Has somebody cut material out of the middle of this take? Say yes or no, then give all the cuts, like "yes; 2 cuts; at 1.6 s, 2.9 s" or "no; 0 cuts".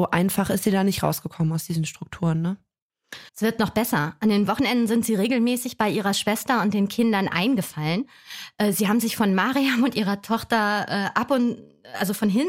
yes; 1 cut; at 3.3 s